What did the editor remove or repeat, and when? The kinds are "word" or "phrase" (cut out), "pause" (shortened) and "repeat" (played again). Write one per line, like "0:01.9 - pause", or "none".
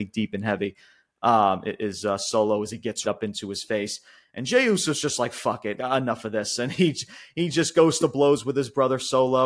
0:03.0 - word
0:05.8 - word